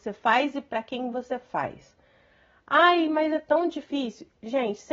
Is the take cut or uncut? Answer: uncut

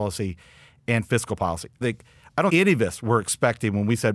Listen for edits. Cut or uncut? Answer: cut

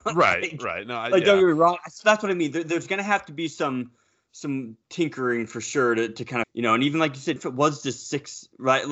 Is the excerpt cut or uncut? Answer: cut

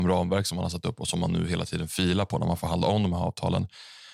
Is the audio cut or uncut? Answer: uncut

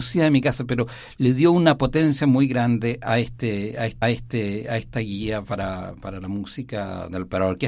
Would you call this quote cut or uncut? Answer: cut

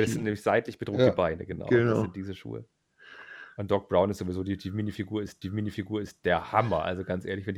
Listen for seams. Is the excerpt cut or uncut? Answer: cut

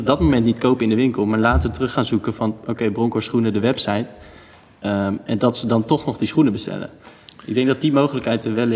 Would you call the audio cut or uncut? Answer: uncut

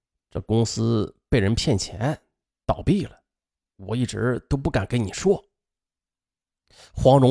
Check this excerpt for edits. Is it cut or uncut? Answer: uncut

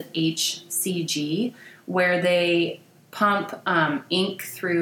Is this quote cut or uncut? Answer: uncut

